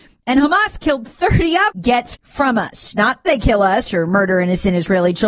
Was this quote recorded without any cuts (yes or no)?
no